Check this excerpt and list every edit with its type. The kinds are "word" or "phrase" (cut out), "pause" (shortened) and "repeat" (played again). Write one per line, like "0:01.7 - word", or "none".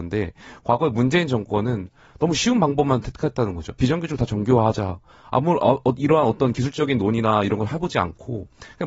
none